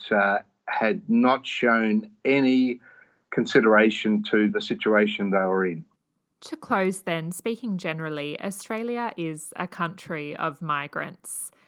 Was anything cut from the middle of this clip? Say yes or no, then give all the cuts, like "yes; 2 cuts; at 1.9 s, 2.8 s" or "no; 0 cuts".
no; 0 cuts